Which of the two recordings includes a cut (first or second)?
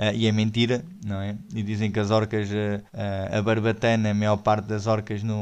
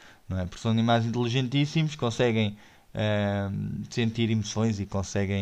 first